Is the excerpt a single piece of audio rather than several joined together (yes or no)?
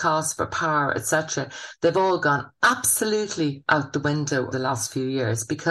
no